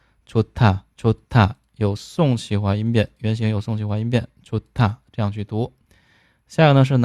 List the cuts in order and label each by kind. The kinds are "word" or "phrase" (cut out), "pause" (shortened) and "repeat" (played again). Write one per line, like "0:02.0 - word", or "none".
0:00.9 - pause